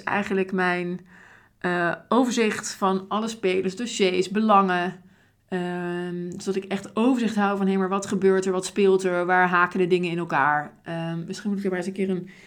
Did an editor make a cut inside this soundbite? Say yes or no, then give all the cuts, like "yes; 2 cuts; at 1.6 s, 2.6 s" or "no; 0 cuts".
no; 0 cuts